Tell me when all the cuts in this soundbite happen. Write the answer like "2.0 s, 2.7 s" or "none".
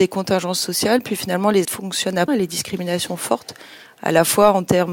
1.6 s, 2.3 s, 3.1 s